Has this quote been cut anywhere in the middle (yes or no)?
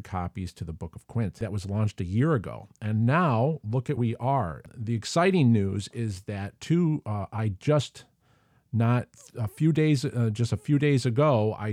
yes